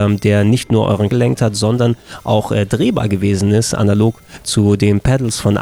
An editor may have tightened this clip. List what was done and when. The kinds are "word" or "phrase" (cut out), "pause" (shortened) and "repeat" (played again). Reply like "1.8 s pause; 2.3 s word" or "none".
1.1 s word